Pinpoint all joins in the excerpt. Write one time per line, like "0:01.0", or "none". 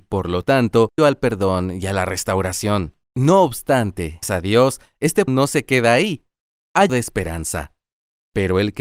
0:01.0
0:03.0
0:04.2
0:05.3
0:06.9